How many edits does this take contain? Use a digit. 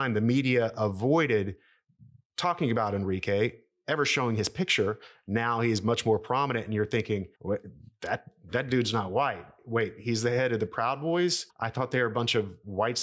2